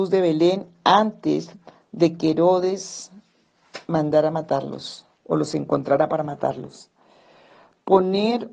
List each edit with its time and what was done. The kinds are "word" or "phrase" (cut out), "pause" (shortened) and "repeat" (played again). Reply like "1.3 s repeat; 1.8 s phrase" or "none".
5.1 s pause